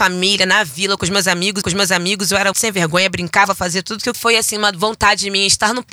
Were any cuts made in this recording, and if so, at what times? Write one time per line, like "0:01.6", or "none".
0:01.6
0:02.5
0:04.1